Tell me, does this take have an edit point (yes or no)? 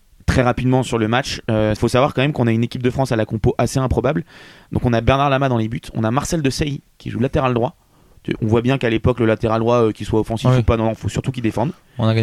no